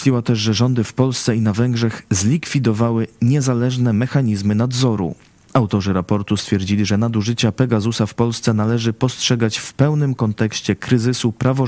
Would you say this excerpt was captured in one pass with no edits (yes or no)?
yes